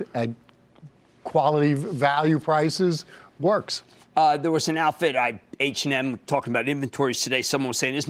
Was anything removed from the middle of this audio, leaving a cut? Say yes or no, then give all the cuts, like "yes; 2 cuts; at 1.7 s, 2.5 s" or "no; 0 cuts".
no; 0 cuts